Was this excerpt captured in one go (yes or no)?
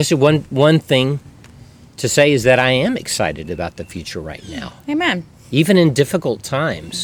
yes